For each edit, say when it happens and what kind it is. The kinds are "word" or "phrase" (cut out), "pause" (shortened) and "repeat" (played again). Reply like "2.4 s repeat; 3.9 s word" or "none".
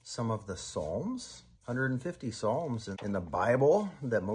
1.5 s pause; 2.9 s word